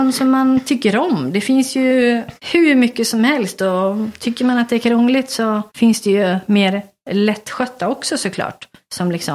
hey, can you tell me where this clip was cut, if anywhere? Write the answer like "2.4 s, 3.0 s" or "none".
2.4 s, 5.7 s

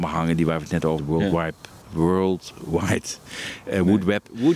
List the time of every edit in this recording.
1.0 s

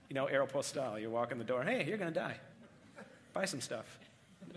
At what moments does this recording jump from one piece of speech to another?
2.5 s

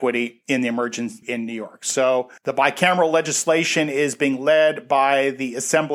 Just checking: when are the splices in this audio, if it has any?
1.2 s, 2.4 s

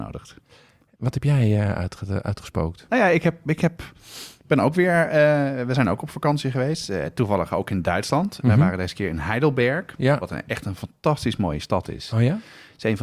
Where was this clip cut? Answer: none

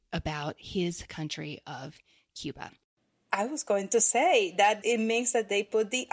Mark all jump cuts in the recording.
4.8 s

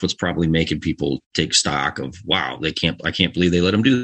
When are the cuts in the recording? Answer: 1.2 s

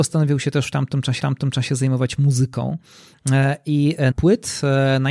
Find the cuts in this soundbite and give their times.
1.2 s, 4.1 s

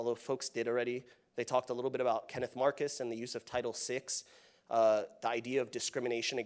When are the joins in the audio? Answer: none

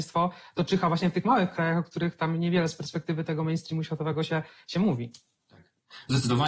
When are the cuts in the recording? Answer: none

